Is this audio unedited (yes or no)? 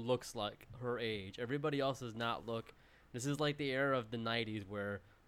yes